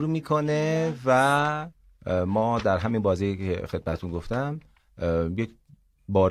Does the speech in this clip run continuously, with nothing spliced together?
yes; 0 cuts

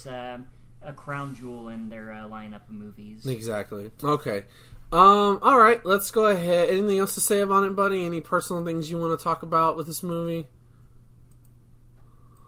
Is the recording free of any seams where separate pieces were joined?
no; 1 cut; at 4.0 s

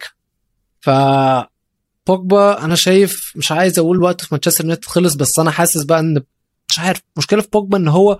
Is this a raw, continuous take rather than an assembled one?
yes; 0 cuts

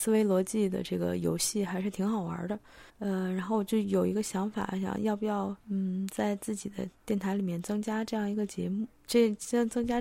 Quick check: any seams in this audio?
yes; 2 cuts; at 2.9 s, 5.6 s

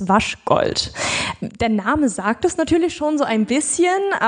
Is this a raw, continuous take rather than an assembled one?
yes; 0 cuts

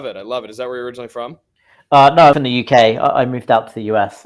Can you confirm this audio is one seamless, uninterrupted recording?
no; 1 cut; at 2.3 s

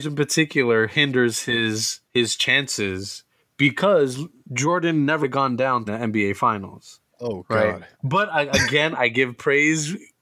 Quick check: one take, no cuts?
no; 4 cuts; at 2.0 s, 5.2 s, 5.9 s, 7.9 s

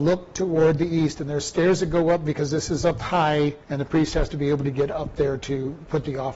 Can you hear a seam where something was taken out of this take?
yes; 1 cut; at 3.6 s

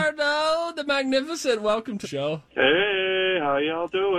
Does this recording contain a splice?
yes; 2 cuts; at 2.0 s, 2.5 s

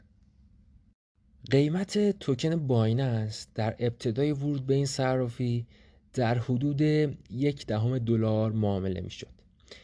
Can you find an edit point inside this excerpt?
no; 0 cuts

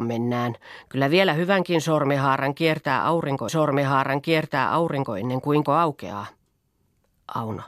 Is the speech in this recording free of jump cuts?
no; 2 cuts; at 3.5 s, 5.7 s

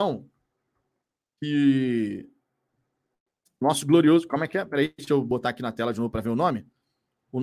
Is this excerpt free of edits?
yes; 0 cuts

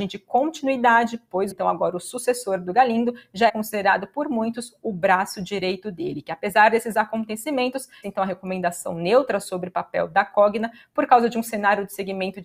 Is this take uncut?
no; 3 cuts; at 1.5 s, 3.5 s, 8.0 s

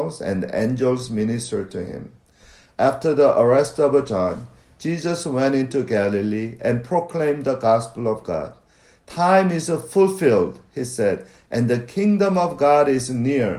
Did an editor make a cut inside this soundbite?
no; 0 cuts

